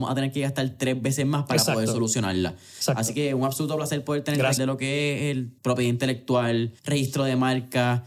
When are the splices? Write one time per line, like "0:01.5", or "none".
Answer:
0:04.6
0:05.6
0:06.8